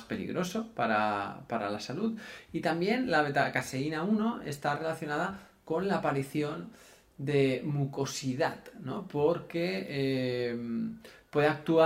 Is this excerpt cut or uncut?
uncut